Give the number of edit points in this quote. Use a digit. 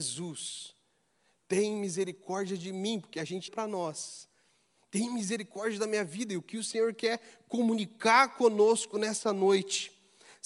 1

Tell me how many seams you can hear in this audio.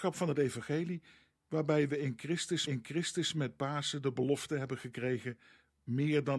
1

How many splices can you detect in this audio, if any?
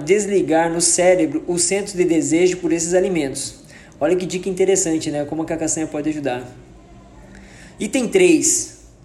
0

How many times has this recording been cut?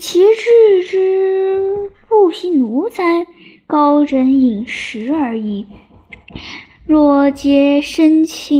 0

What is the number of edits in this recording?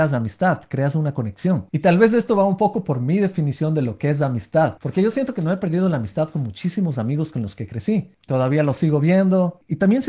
1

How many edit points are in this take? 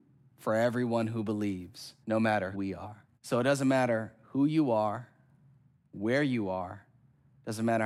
3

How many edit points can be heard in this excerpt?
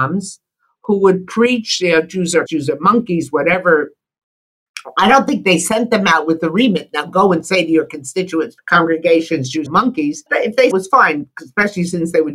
5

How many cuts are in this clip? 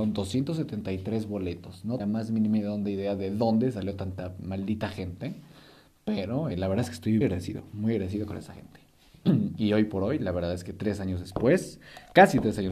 3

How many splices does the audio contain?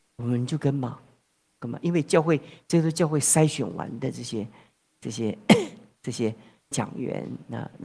0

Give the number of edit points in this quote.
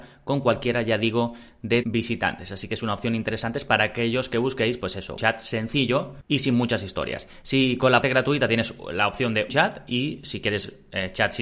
4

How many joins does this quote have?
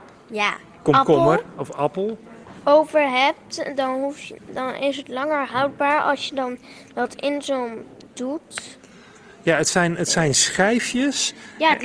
1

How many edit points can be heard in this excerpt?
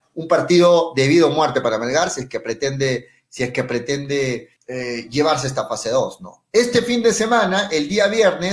1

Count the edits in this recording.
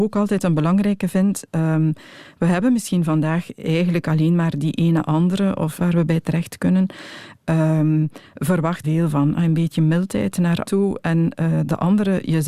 3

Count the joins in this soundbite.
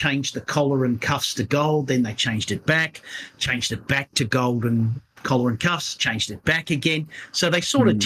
0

